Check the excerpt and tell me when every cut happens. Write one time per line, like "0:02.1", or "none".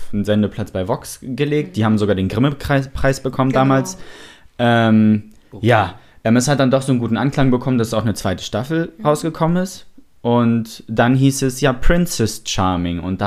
none